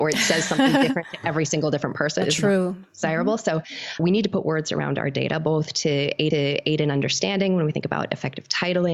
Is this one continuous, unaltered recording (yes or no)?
no